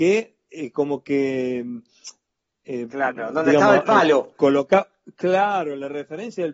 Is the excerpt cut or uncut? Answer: uncut